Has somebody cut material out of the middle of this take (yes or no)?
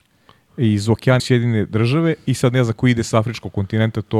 yes